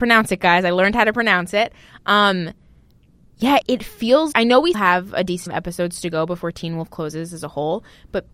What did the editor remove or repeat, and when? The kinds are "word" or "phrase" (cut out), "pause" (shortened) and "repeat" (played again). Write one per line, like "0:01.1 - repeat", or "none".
0:03.6 - word
0:04.3 - word
0:04.7 - word
0:05.5 - word